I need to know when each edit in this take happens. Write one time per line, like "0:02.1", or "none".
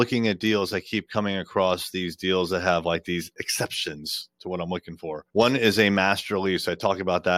0:05.3